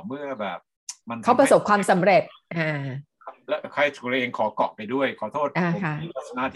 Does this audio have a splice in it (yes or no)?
yes